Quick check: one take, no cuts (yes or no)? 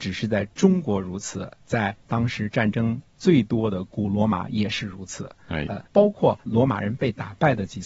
no